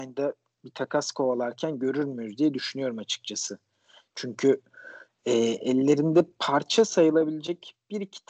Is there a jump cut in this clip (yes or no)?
no